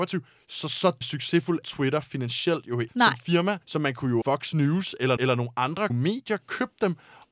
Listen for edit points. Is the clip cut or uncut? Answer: cut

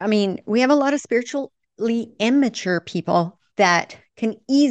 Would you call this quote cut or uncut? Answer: uncut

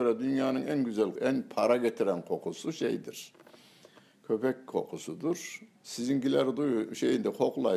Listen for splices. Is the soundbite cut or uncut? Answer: cut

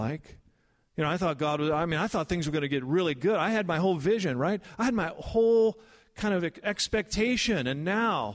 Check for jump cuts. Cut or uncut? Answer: uncut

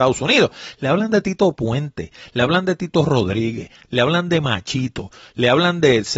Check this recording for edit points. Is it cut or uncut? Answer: uncut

